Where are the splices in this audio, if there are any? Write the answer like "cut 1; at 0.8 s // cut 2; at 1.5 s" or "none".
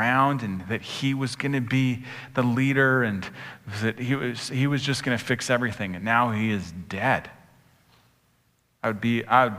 none